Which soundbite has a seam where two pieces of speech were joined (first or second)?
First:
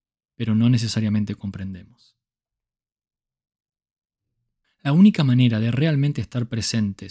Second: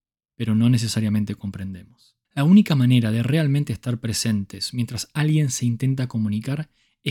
second